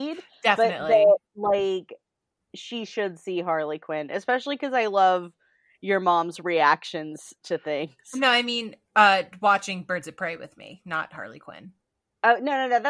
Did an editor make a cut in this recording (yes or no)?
no